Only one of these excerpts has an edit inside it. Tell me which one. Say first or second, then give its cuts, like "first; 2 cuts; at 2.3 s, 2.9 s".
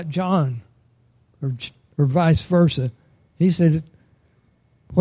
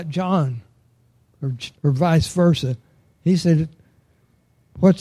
second; 1 cut; at 1.8 s